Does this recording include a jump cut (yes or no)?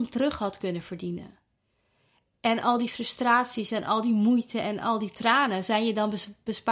no